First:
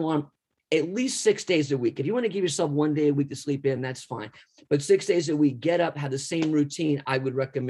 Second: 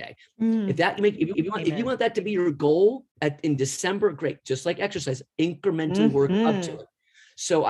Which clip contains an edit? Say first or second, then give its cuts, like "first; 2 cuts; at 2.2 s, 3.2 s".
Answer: second; 2 cuts; at 1.3 s, 3.1 s